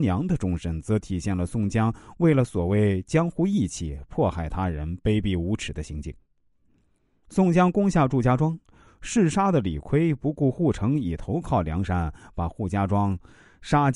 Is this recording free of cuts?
yes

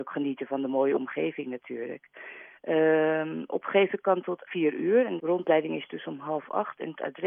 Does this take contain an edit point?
yes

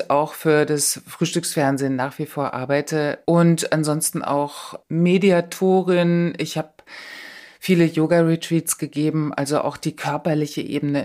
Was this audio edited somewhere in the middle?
no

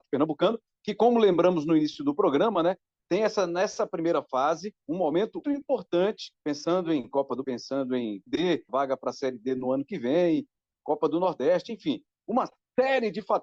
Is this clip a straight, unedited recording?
no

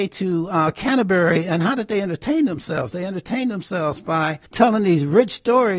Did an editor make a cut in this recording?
yes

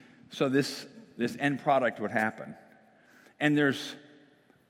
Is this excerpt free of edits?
yes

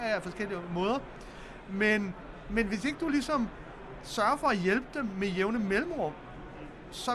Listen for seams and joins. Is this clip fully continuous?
yes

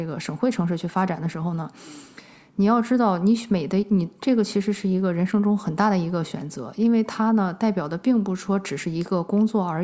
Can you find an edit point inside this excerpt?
no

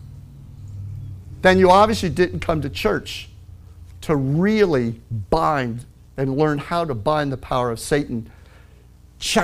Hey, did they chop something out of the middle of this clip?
no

